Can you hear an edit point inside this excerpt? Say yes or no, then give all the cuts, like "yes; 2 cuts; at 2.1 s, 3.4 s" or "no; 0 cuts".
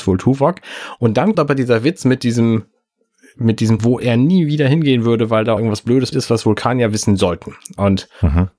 yes; 4 cuts; at 1.3 s, 3.8 s, 5.6 s, 6.1 s